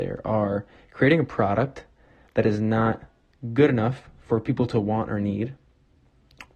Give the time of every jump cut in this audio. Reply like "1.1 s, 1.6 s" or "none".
none